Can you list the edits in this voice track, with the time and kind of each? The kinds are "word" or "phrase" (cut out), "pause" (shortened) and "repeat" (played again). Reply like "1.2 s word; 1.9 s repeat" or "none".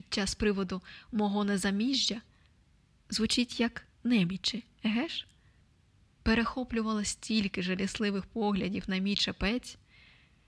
none